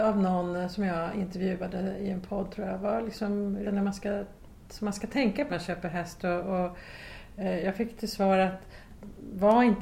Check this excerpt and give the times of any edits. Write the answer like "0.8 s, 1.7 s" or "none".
3.6 s, 5.5 s